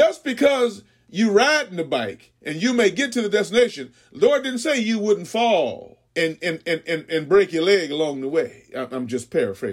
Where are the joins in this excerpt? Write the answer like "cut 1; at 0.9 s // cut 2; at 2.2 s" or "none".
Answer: cut 1; at 2.4 s // cut 2; at 6.1 s